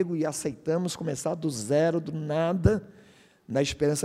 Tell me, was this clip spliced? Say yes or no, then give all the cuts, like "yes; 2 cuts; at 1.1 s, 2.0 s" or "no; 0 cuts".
no; 0 cuts